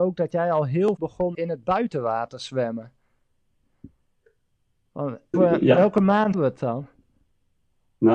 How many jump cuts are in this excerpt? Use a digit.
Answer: 4